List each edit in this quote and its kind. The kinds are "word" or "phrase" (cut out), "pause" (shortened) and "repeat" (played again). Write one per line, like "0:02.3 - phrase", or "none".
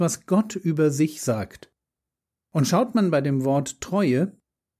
none